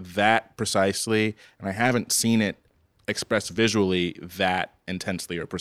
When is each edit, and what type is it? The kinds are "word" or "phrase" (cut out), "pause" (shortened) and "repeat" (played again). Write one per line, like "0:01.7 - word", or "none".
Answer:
none